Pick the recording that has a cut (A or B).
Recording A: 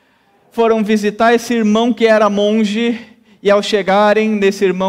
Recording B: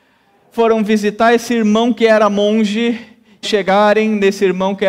B